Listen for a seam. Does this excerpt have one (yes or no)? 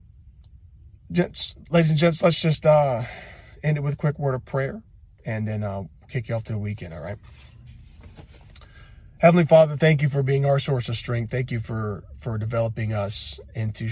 no